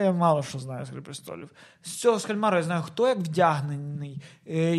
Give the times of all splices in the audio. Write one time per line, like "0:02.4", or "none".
none